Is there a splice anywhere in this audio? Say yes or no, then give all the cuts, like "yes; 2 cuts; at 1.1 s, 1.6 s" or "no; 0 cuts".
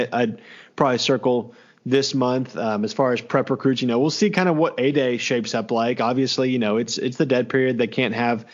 no; 0 cuts